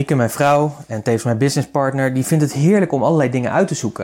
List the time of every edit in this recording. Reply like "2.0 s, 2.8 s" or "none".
none

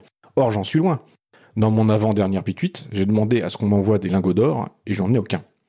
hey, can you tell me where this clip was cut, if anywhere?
none

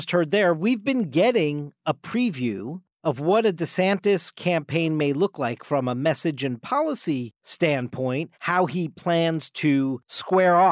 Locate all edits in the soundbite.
8.3 s

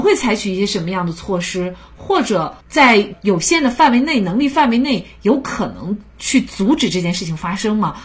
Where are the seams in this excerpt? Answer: 2.6 s

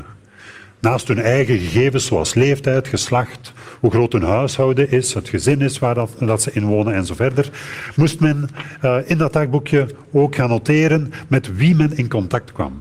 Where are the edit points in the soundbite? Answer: none

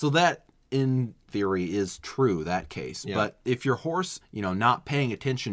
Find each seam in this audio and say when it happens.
1.3 s, 4.2 s

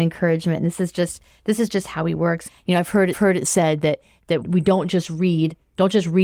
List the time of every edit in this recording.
3.1 s, 4.4 s

